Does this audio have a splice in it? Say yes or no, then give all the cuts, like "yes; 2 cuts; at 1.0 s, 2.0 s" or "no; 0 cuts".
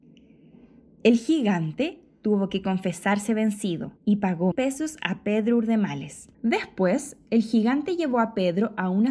yes; 3 cuts; at 4.0 s, 4.5 s, 6.3 s